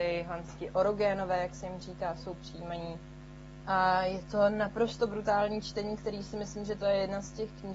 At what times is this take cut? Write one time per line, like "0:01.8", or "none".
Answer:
none